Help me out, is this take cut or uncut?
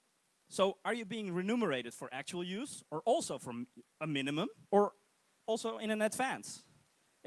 cut